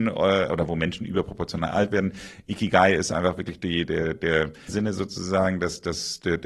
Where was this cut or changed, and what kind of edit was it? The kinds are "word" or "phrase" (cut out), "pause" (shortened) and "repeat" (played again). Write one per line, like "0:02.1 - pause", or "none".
0:03.9 - word
0:04.7 - word